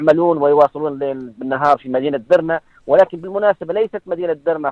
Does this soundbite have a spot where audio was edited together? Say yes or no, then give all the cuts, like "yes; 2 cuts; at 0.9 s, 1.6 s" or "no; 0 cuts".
no; 0 cuts